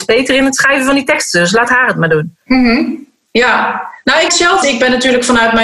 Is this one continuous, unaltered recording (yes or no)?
no